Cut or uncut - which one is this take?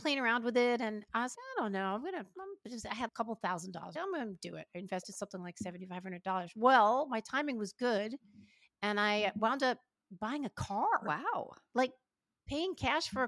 cut